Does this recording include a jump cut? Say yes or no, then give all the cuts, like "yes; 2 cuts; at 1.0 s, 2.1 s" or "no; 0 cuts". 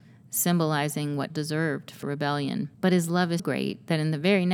yes; 4 cuts; at 1.3 s, 2.0 s, 2.7 s, 3.4 s